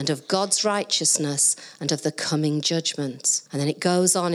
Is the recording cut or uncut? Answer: cut